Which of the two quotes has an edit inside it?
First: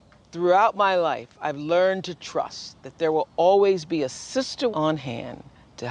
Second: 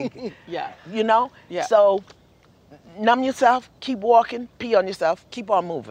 first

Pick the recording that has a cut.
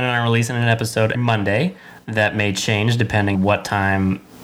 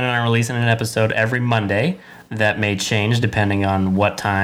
first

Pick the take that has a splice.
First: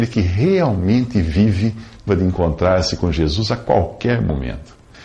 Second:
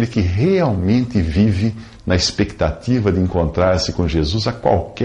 first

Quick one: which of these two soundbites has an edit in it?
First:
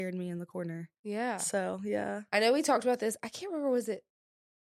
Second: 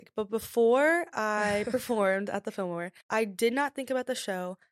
second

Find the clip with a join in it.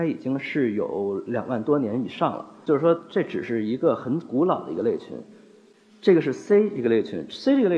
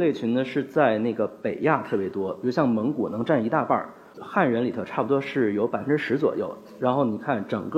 second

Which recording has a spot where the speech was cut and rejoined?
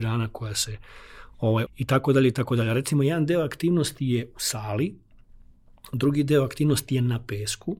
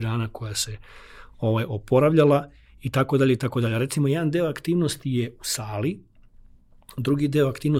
first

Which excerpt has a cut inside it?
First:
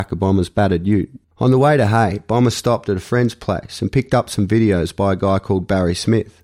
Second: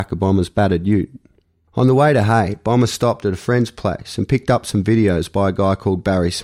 first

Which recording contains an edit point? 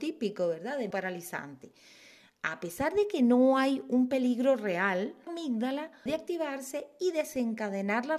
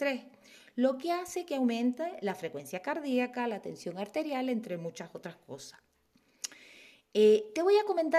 first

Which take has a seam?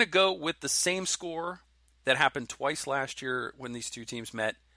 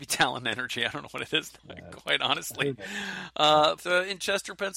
second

